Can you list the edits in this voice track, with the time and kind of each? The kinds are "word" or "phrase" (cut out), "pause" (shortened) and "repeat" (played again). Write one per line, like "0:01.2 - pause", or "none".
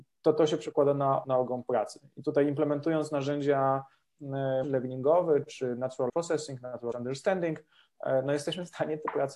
0:01.2 - word
0:04.6 - word
0:06.1 - word
0:06.9 - word

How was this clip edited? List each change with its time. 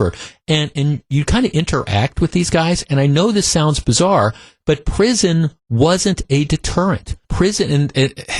0:05.6 - pause
0:07.2 - pause

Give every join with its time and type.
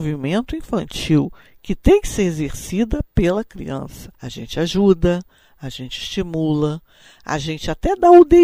0:04.1 - pause

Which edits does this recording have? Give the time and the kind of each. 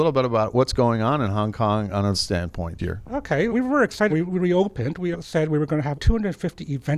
0:02.1 - word
0:02.8 - word
0:03.5 - word
0:04.1 - word
0:05.1 - word
0:05.9 - word

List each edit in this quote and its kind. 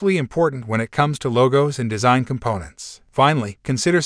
none

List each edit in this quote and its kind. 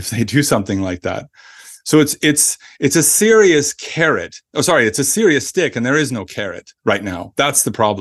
0:04.4 - pause
0:06.8 - pause

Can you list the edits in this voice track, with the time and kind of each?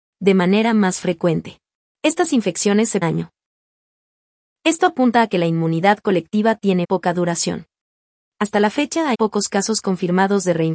0:03.0 - phrase
0:06.8 - word
0:09.1 - word

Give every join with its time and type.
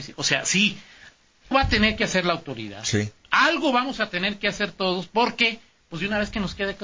0:01.5 - word

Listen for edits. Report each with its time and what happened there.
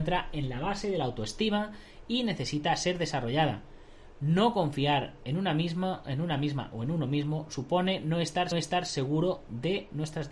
0:08.5 - repeat

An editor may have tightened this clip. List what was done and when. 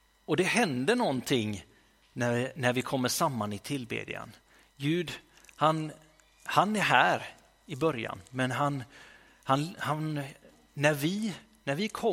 none

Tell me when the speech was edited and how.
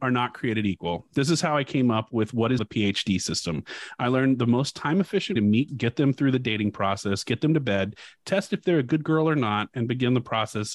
0:02.6 - word
0:05.4 - word
0:05.7 - word

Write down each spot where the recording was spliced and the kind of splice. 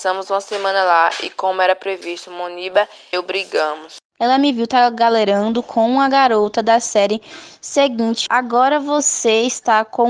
0:03.1 - word
0:08.3 - phrase

